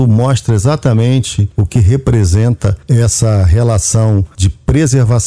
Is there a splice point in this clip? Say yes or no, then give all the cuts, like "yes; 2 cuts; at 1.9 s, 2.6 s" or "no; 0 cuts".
no; 0 cuts